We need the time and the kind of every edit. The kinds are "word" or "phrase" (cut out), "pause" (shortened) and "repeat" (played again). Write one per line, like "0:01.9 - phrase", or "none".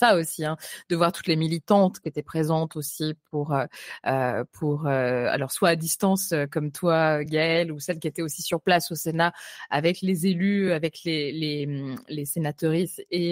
none